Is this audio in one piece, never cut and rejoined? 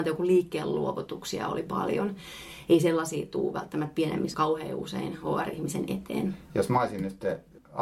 no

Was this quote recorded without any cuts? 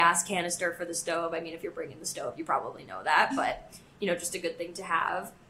yes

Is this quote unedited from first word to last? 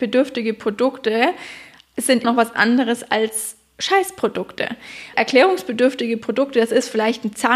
no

